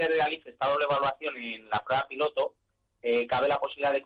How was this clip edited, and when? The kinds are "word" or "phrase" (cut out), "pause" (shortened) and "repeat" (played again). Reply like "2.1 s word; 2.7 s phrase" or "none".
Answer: none

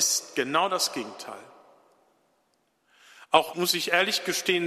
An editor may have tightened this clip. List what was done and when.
3.5 s word

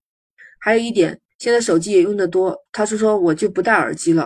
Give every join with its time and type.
2.7 s pause

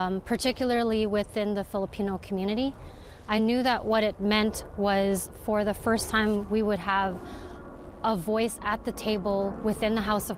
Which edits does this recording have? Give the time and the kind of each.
none

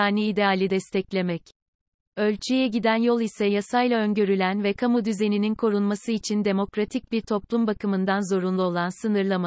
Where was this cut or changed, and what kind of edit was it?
none

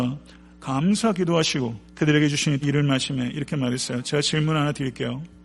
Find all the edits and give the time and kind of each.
1.8 s pause; 2.6 s word

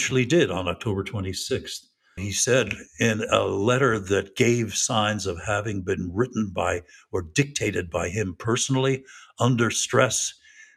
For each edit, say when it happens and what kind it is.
2.2 s word

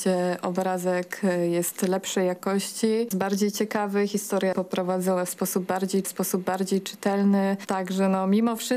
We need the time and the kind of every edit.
3.1 s word; 4.5 s word; 6.0 s repeat

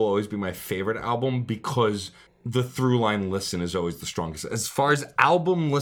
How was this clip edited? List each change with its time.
2.3 s pause

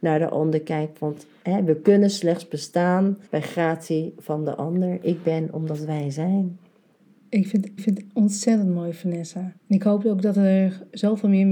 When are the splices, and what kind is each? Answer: 3.3 s pause; 7.8 s repeat; 9.6 s pause

